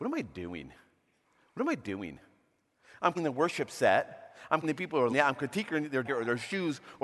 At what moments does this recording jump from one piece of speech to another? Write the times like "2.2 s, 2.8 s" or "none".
3.1 s, 4.6 s, 5.1 s, 6.0 s